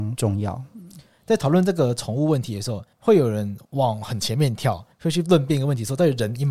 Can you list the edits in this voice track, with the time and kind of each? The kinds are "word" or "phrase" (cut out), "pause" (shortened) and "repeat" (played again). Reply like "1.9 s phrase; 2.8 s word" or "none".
2.9 s pause; 3.6 s pause; 4.9 s pause